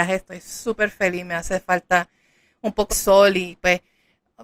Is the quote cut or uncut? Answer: cut